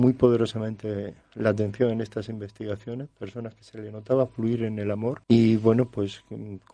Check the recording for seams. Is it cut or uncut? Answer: cut